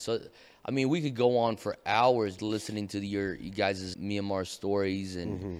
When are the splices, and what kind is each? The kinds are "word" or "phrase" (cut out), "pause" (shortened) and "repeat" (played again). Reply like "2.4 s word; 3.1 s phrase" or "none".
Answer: 2.4 s word; 3.9 s word